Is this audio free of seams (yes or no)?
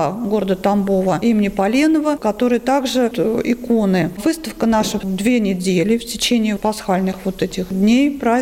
no